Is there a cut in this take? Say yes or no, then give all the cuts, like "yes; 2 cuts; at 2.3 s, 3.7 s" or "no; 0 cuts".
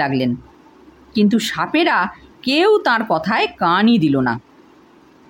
no; 0 cuts